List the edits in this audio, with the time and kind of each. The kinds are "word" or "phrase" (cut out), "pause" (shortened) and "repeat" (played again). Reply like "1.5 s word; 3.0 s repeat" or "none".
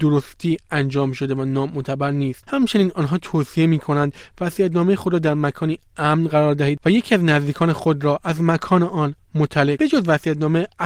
9.8 s word

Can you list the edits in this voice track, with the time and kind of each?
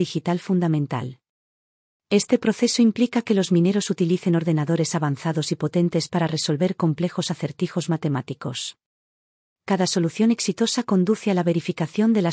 none

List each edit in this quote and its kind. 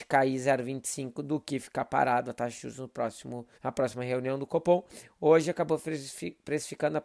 3.5 s pause

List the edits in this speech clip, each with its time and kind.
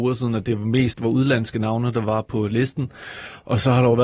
none

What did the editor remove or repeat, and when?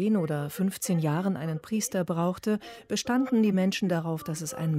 none

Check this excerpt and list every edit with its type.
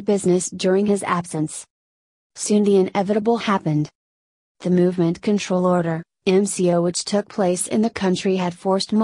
4.6 s phrase

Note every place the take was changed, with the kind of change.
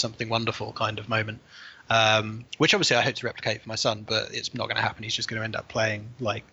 2.5 s pause

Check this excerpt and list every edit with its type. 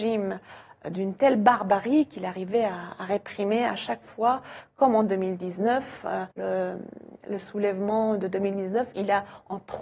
6.3 s pause

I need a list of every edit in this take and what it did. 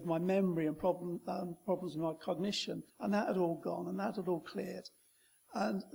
2.9 s pause

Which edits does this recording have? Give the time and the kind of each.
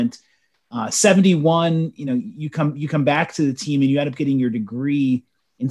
none

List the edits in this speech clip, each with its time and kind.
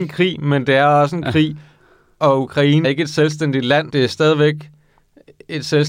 2.8 s word; 3.9 s word

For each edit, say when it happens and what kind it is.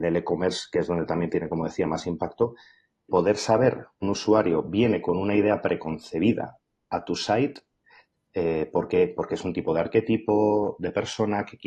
3.1 s word; 4.0 s phrase

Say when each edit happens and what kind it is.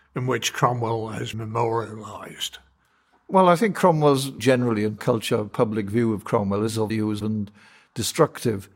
1.3 s word; 4.4 s word; 5.0 s word; 5.5 s word; 6.9 s word; 7.2 s word

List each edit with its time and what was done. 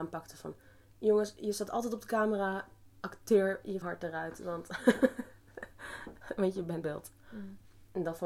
3.8 s word; 6.8 s word

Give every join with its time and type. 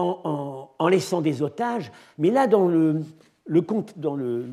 none

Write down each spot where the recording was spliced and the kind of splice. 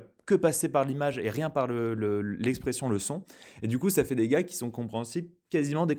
none

